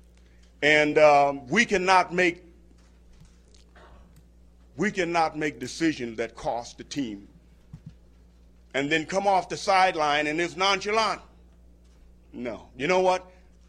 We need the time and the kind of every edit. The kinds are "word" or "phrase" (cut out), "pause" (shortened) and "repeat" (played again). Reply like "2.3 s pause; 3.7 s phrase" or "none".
none